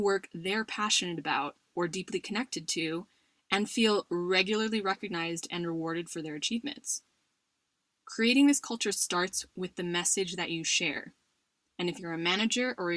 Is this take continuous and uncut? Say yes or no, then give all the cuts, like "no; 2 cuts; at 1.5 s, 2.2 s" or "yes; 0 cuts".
yes; 0 cuts